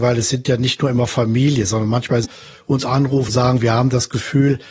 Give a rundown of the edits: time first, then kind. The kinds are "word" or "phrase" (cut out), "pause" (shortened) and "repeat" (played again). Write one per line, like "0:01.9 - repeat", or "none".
0:02.2 - phrase
0:03.3 - word